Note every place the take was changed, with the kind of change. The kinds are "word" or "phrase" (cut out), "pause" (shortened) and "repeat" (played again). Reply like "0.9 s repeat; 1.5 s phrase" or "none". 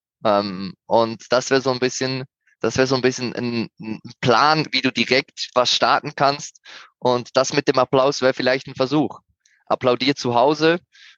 2.5 s word